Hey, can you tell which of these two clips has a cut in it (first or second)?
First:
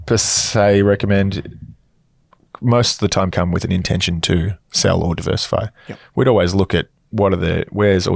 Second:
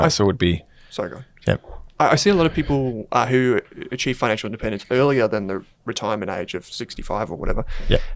first